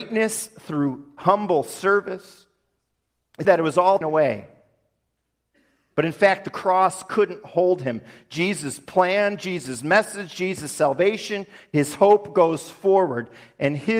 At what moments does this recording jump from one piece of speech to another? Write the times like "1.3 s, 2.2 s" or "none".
3.4 s, 4.0 s